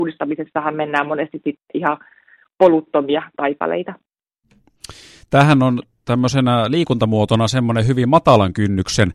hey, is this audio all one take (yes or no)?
yes